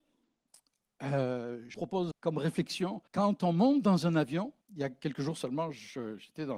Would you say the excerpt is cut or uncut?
cut